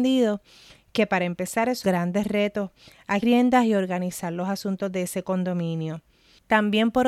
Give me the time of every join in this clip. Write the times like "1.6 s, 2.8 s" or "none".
1.8 s, 3.2 s

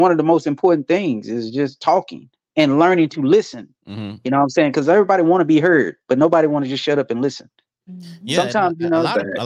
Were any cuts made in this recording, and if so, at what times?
2.4 s, 3.8 s

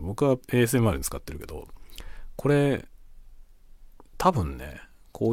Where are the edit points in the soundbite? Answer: none

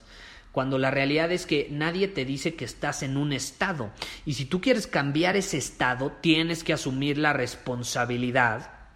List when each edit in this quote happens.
none

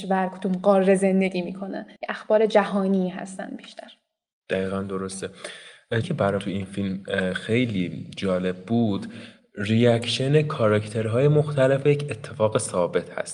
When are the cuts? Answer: 2.0 s, 6.0 s, 6.4 s, 11.8 s

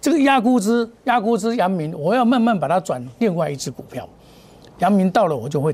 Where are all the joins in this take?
none

